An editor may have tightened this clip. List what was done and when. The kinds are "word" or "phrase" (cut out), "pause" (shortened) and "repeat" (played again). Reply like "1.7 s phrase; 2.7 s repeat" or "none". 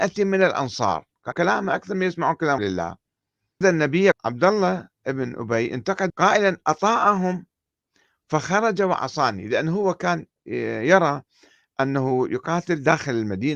1.3 s word; 2.6 s word; 3.6 s word; 4.1 s word; 6.1 s word